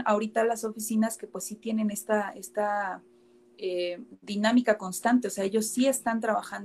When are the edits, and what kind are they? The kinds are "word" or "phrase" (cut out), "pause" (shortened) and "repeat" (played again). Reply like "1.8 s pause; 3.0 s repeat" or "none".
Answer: none